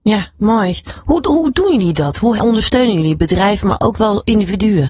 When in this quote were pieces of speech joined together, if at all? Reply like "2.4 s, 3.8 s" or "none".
2.4 s